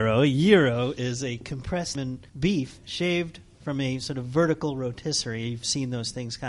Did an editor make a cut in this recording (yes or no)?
yes